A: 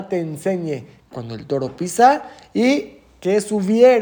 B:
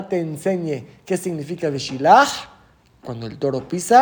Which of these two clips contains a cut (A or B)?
A